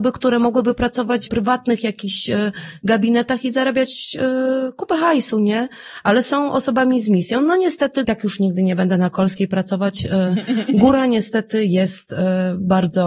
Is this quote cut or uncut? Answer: cut